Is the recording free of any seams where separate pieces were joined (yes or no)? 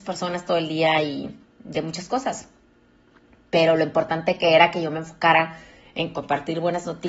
yes